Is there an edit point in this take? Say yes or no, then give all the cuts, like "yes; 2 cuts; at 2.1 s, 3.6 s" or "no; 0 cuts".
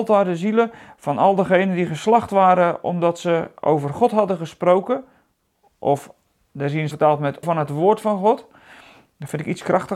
yes; 2 cuts; at 6.9 s, 7.4 s